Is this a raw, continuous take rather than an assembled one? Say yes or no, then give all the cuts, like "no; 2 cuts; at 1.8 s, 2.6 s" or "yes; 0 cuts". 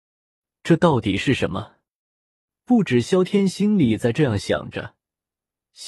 yes; 0 cuts